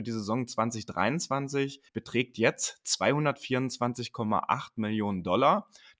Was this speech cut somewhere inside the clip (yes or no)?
yes